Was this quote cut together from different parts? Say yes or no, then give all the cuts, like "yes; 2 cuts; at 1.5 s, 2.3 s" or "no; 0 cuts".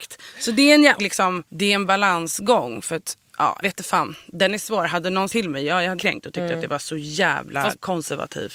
yes; 5 cuts; at 1.0 s, 1.5 s, 3.6 s, 5.3 s, 6.0 s